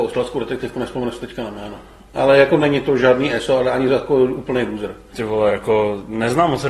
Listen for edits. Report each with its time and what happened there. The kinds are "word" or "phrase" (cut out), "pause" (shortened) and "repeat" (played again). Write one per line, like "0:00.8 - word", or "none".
none